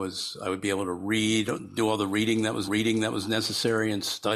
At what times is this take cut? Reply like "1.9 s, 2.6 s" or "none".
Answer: 2.7 s